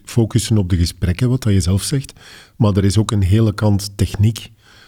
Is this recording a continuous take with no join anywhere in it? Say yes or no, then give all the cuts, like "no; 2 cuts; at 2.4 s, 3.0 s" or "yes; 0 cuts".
yes; 0 cuts